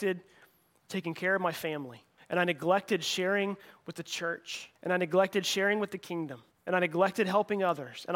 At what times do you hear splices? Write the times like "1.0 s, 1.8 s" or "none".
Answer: 2.2 s, 4.8 s, 6.5 s